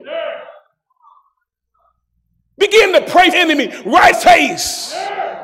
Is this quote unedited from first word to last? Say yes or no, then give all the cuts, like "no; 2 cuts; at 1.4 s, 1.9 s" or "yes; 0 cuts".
no; 2 cuts; at 3.3 s, 4.1 s